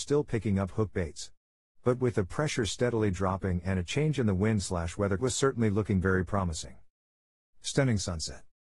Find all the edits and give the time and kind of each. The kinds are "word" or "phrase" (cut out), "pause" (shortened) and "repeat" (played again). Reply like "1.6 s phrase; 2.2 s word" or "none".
5.2 s phrase